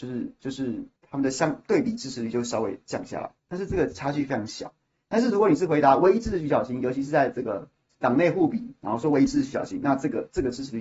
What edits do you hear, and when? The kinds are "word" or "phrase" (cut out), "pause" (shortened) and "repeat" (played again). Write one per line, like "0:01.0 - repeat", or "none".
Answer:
0:01.0 - pause
0:03.4 - pause